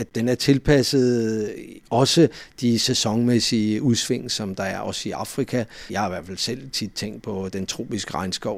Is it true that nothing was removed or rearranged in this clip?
yes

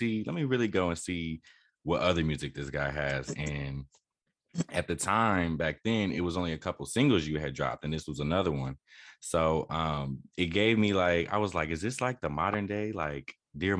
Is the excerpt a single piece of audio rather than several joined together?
yes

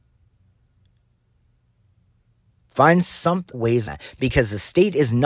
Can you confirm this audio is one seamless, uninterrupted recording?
no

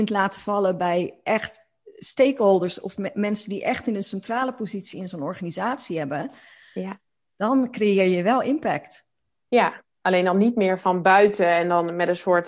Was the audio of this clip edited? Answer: no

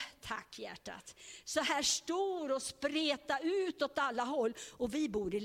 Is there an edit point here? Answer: no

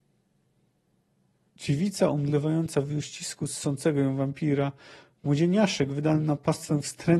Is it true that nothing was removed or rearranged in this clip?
yes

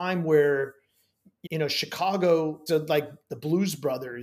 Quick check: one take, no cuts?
no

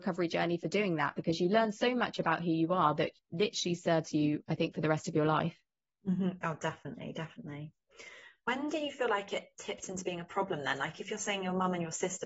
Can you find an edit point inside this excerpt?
no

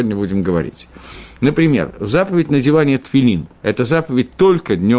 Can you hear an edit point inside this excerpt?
yes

